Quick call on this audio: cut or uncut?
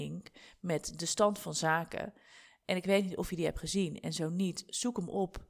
uncut